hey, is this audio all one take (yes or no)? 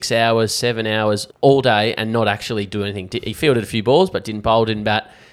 no